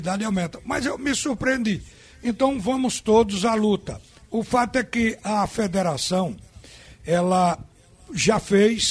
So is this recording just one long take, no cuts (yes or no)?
yes